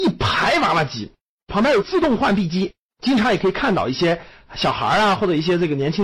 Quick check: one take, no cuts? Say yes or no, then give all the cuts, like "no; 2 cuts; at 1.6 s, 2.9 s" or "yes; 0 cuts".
yes; 0 cuts